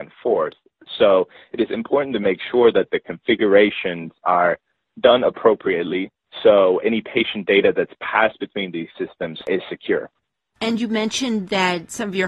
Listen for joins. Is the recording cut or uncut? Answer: cut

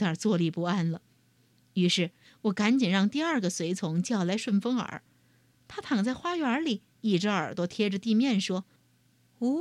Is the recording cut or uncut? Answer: cut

